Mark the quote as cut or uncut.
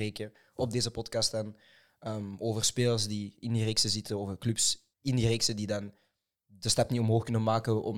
cut